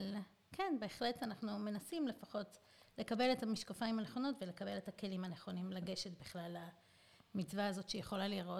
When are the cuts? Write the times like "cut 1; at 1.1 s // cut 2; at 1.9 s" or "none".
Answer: none